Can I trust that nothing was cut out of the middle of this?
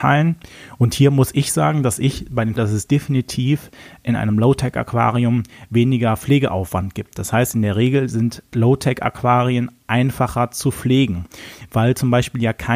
no; 1 cut; at 2.6 s

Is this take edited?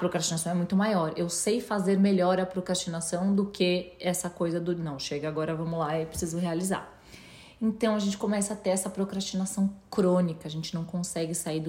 no; 0 cuts

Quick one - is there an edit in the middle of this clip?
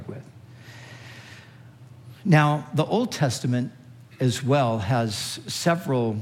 no; 0 cuts

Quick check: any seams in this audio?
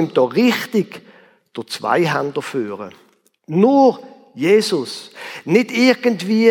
no; 0 cuts

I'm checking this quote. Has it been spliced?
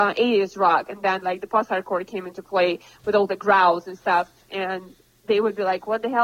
yes; 1 cut; at 4.4 s

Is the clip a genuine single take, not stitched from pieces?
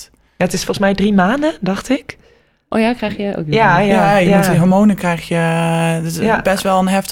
yes; 0 cuts

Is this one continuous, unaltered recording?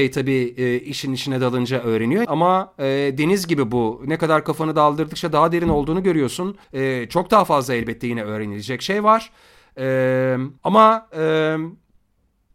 no; 3 cuts; at 2.2 s, 6.6 s, 10.6 s

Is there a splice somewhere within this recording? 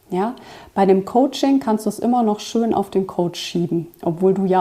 no; 0 cuts

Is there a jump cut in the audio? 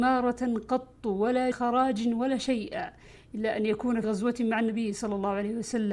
yes; 2 cuts; at 1.5 s, 4.0 s

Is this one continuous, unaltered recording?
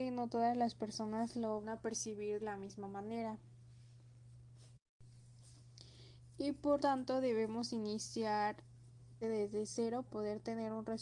no; 5 cuts; at 1.6 s, 2.4 s, 6.8 s, 9.2 s, 10.1 s

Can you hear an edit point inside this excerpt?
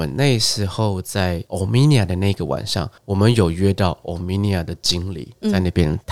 yes; 1 cut; at 3.0 s

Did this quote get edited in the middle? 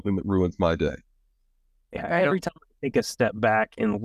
no; 0 cuts

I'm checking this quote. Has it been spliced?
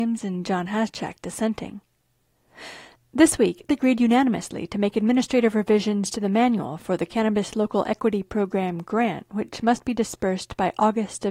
yes; 1 cut; at 3.7 s

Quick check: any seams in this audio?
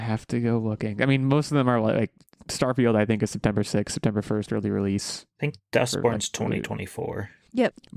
no; 0 cuts

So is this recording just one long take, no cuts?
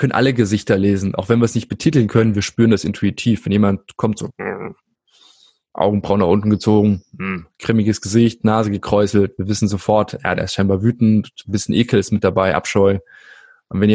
yes; 0 cuts

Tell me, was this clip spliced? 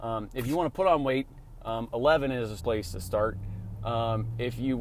yes; 1 cut; at 2.6 s

